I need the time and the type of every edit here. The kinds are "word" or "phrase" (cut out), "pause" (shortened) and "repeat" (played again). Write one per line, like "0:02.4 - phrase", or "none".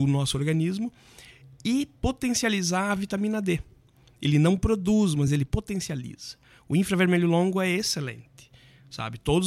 none